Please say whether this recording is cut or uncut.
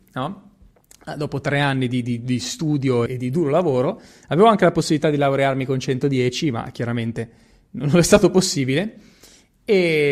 cut